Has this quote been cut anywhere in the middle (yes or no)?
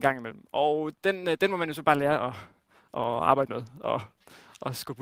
no